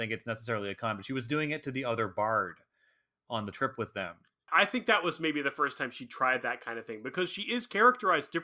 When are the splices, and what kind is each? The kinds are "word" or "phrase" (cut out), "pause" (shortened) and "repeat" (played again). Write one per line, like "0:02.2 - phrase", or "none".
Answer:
none

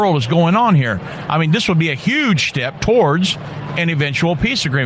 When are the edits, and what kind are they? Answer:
none

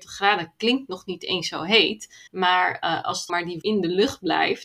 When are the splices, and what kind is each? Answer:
0:02.3 - pause
0:03.3 - word
0:03.6 - word

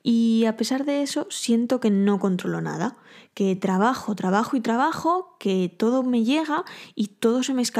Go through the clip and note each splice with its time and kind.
none

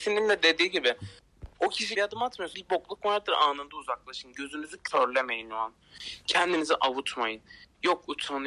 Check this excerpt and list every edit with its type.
0:01.9 - word
0:02.5 - word

